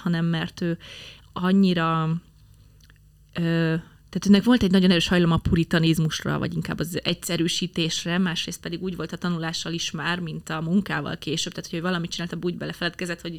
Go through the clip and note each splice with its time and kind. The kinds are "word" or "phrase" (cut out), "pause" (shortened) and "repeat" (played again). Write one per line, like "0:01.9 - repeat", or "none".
none